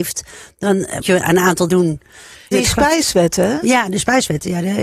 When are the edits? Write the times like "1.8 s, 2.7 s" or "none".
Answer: 1.0 s, 1.7 s, 2.5 s

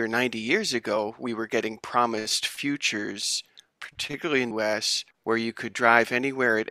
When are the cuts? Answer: 4.5 s, 5.1 s

